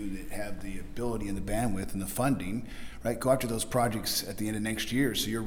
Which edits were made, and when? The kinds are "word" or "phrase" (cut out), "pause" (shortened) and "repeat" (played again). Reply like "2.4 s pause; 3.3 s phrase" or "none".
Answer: none